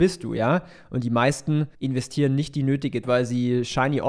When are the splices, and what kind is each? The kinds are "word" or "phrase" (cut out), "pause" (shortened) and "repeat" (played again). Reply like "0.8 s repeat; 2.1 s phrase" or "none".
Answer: 1.7 s pause; 3.0 s word

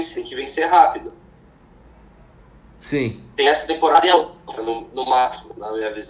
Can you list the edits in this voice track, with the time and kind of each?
none

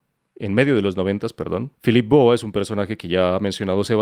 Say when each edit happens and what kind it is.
1.7 s pause

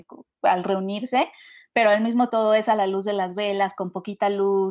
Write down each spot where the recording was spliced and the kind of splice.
2.3 s word

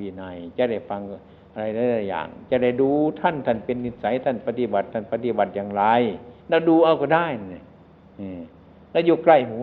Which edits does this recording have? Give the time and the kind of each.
6.4 s pause

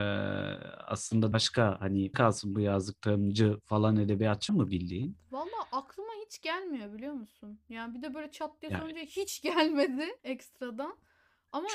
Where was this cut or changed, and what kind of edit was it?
1.3 s word; 2.1 s word; 4.5 s word; 10.2 s pause

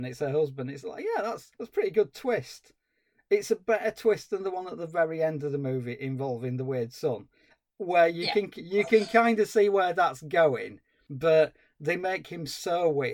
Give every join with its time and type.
none

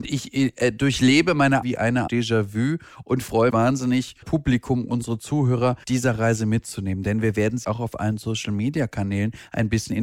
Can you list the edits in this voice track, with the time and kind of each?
1.6 s phrase; 2.1 s word; 3.5 s word; 4.2 s word; 5.8 s word; 7.6 s word

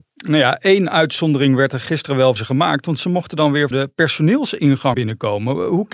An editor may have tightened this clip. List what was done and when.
2.4 s word; 3.7 s word; 4.9 s word

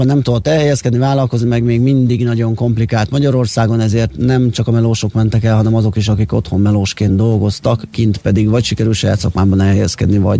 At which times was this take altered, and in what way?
none

